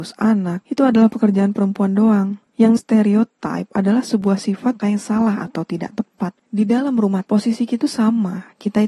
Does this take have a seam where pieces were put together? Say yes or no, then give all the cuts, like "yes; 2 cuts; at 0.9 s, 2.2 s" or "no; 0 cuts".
yes; 4 cuts; at 2.8 s, 4.8 s, 7.3 s, 7.8 s